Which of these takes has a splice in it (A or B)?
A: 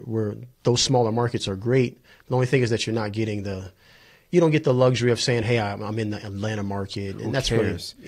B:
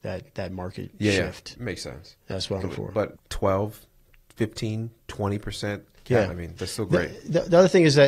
B